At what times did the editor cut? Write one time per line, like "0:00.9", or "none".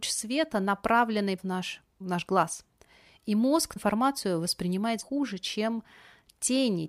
0:01.4
0:02.0
0:03.8
0:05.0